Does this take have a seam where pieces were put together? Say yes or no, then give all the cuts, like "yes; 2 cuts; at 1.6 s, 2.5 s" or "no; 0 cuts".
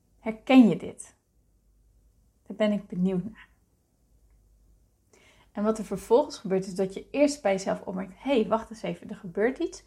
no; 0 cuts